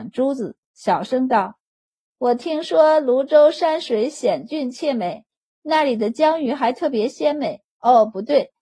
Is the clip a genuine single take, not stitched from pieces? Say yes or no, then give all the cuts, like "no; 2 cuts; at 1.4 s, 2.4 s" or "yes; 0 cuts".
yes; 0 cuts